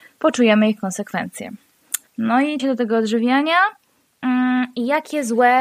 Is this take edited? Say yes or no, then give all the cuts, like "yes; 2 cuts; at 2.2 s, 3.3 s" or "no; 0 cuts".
yes; 2 cuts; at 2.1 s, 2.6 s